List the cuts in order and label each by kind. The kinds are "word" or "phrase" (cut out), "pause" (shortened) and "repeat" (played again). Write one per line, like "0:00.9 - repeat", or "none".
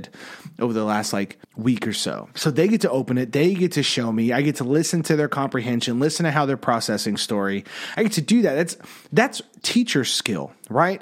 0:01.4 - pause

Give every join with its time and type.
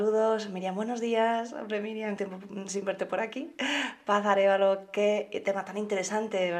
0:02.2 - word

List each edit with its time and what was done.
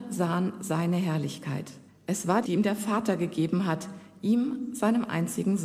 0:01.9 - pause
0:02.4 - word

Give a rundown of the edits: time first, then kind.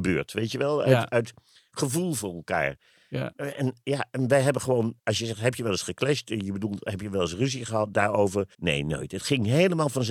0:05.0 - pause
0:08.5 - pause

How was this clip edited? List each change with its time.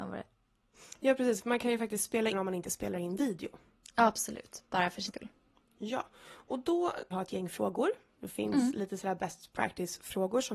0:02.3 - phrase
0:05.1 - word
0:07.1 - phrase

